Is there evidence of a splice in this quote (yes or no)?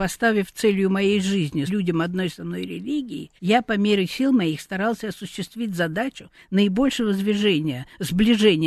yes